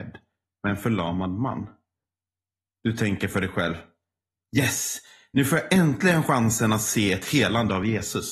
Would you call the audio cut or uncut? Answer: uncut